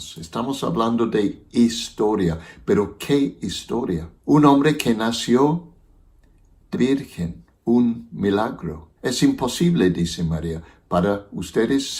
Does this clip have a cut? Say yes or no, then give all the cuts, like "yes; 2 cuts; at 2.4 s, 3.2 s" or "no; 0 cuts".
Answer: yes; 3 cuts; at 4.2 s, 6.7 s, 9.0 s